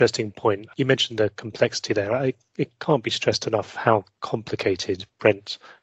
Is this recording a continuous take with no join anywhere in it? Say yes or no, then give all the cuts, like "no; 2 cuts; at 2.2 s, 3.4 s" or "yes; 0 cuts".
yes; 0 cuts